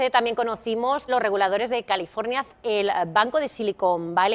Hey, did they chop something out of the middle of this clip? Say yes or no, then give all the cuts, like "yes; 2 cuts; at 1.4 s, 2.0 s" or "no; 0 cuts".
yes; 2 cuts; at 1.1 s, 2.5 s